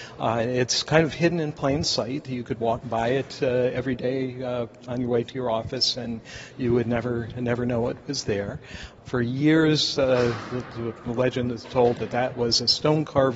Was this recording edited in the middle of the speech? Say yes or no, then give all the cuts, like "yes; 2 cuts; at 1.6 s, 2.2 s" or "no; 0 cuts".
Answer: no; 0 cuts